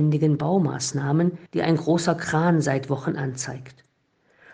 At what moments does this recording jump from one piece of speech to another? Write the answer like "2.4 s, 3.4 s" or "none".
1.5 s